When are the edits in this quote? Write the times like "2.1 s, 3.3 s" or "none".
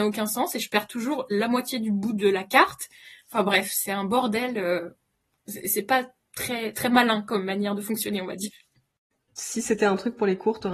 none

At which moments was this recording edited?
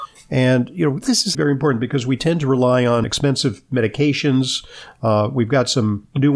1.0 s, 1.3 s, 3.0 s

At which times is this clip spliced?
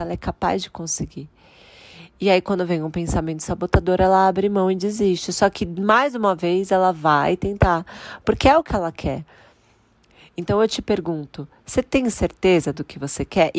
none

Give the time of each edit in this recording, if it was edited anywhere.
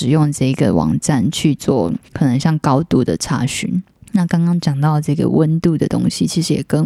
2.1 s, 3.9 s

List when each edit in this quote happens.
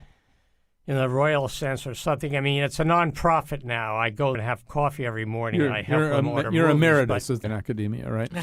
4.3 s, 7.4 s

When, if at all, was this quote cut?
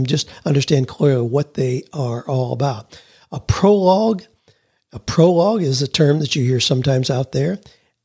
none

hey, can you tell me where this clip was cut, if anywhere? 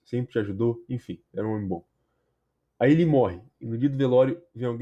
none

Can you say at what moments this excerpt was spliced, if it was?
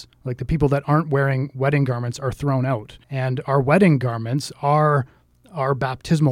3.0 s

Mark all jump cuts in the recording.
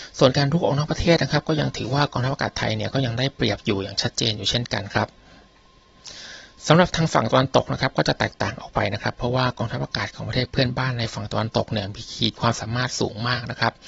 6.5 s

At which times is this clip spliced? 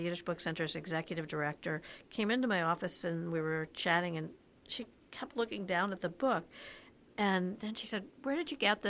none

